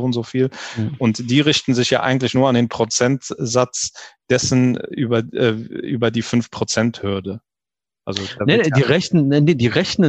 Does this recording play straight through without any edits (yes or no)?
yes